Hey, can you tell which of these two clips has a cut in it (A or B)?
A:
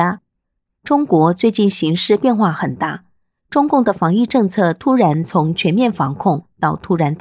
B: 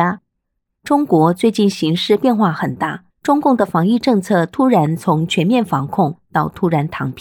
B